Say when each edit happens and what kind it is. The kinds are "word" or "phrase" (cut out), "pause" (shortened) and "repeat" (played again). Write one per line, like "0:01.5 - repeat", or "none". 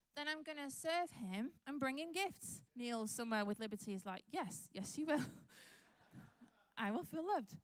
0:01.6 - pause
0:02.7 - pause